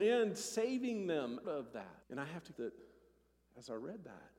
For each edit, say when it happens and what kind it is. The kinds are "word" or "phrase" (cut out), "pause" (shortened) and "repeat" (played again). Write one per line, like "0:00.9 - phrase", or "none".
0:01.4 - word
0:02.0 - pause
0:02.5 - word